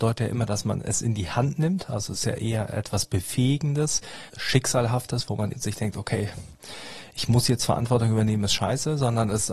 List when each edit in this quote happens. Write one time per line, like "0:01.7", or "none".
0:04.3
0:05.5